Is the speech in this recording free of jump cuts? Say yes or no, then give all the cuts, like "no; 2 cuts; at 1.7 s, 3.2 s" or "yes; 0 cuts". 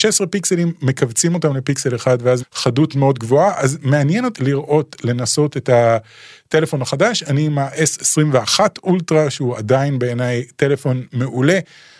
no; 3 cuts; at 2.4 s, 2.9 s, 4.3 s